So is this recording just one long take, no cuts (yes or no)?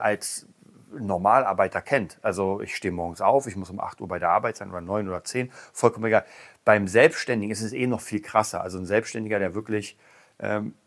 yes